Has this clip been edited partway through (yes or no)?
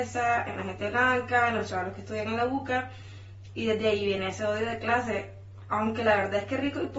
no